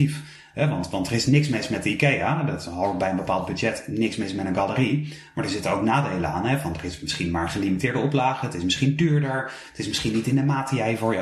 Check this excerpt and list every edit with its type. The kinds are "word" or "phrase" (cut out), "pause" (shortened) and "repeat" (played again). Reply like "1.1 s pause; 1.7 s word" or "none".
none